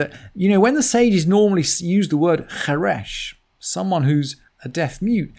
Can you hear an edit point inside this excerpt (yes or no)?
no